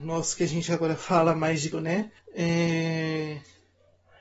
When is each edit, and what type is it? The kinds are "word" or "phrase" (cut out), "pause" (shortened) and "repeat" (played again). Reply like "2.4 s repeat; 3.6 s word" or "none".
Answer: 1.7 s word; 2.2 s pause